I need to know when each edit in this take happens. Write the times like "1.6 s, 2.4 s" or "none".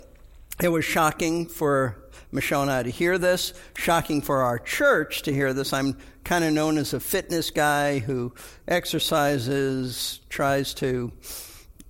none